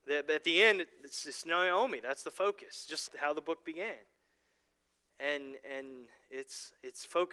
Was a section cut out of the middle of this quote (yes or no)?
yes